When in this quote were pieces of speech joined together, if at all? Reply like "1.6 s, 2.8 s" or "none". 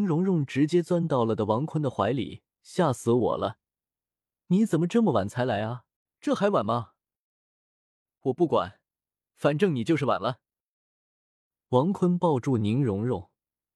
6.0 s